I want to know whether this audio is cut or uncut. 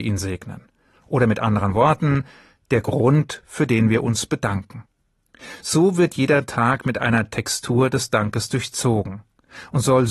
uncut